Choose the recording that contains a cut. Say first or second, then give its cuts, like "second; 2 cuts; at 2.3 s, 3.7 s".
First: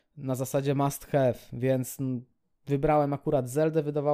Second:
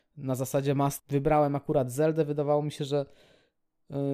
second; 1 cut; at 1.0 s